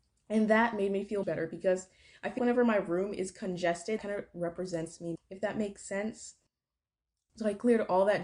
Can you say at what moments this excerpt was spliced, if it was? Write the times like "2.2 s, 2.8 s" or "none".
1.2 s, 2.4 s, 4.0 s, 5.1 s